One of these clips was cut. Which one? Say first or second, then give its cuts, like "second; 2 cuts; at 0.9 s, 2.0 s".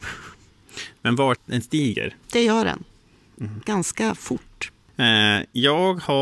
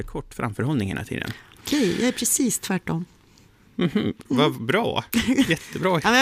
first; 2 cuts; at 1.4 s, 2.2 s